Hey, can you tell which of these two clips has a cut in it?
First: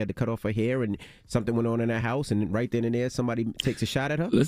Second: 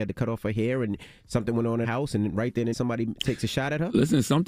second; 2 cuts; at 1.8 s, 2.7 s

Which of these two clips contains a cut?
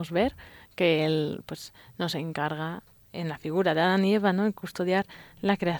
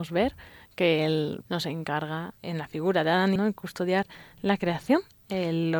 second; 3 cuts; at 1.4 s, 2.4 s, 3.4 s

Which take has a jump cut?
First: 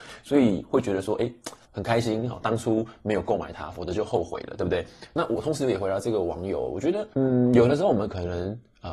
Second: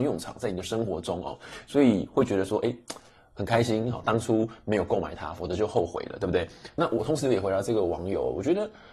first; 2 cuts; at 1.6 s, 7.1 s

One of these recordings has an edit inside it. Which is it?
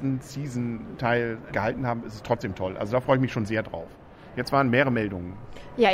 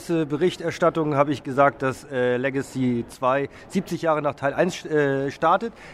first; 1 cut; at 1.5 s

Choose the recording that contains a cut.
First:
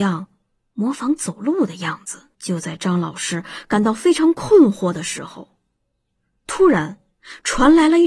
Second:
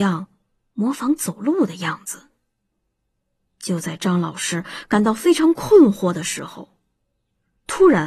first; 1 cut; at 2.3 s

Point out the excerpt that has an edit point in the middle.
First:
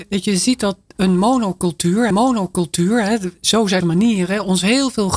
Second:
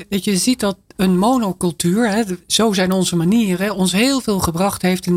first; 2 cuts; at 2.1 s, 3.8 s

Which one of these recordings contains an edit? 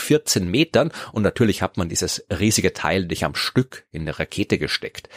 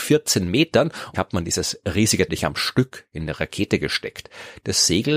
second; 2 cuts; at 1.1 s, 2.3 s

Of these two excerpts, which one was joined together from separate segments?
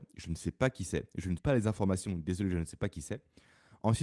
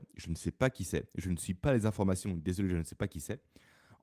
first; 1 cut; at 1.4 s

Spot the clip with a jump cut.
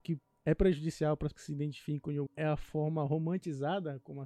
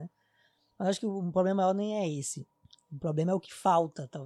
first; 2 cuts; at 1.3 s, 2.3 s

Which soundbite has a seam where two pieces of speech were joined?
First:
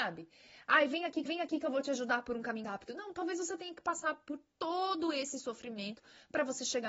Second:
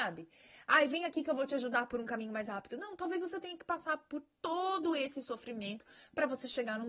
first; 2 cuts; at 1.3 s, 2.6 s

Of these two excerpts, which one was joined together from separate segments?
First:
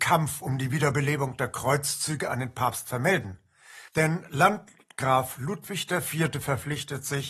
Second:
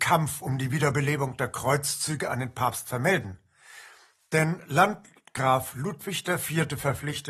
first; 1 cut; at 3.9 s

